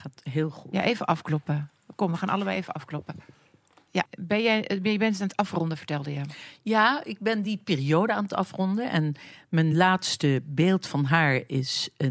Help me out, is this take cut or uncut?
uncut